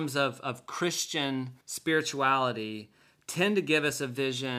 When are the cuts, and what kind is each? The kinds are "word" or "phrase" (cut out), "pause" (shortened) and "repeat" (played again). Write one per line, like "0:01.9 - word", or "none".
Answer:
0:01.6 - pause

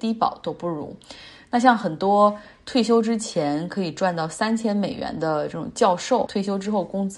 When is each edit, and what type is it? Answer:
0:06.3 - word

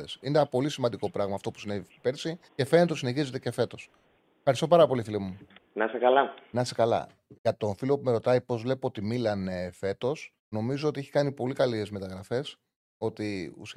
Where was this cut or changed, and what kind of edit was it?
0:02.5 - pause
0:10.4 - pause

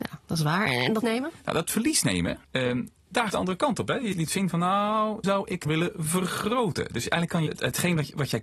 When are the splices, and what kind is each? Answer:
0:01.0 - word
0:02.4 - pause
0:03.3 - phrase
0:04.1 - word
0:05.2 - word
0:05.7 - phrase
0:07.5 - word

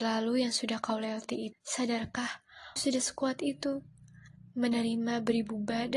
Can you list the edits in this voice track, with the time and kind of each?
0:01.5 - word
0:02.8 - word

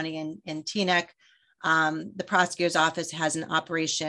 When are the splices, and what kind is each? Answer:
none

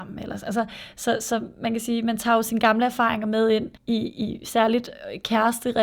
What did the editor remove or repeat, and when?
0:03.8 - pause

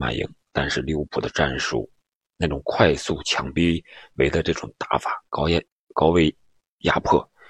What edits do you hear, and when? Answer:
0:05.3 - pause

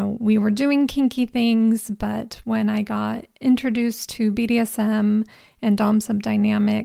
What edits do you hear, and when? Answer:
none

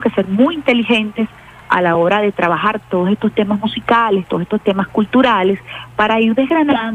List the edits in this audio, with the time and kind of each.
none

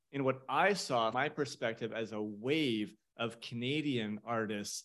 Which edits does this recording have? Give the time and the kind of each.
0:01.1 - word

